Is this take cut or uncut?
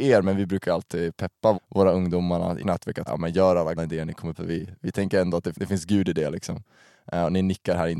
cut